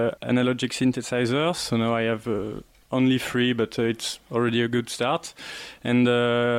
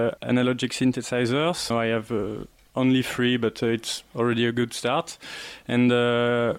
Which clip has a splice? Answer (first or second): second